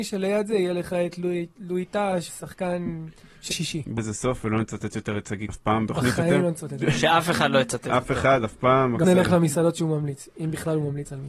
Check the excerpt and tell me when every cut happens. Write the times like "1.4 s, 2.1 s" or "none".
2.3 s, 3.5 s, 4.0 s, 5.5 s, 5.9 s, 9.0 s